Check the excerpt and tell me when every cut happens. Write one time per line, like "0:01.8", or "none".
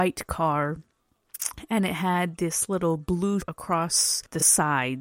0:03.4

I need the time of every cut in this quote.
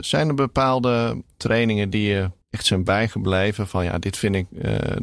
0:02.4

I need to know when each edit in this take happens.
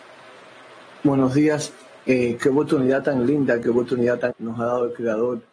0:02.0
0:04.3

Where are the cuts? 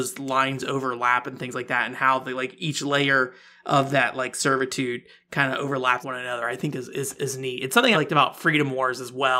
0:06.0
0:07.2
0:07.9

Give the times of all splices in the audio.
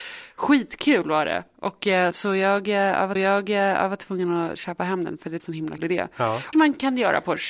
0:02.1
0:03.2
0:05.4
0:05.8
0:06.5

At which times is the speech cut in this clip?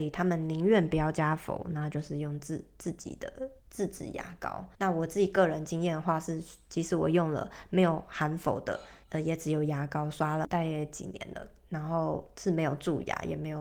0:03.6
0:04.7
0:09.0

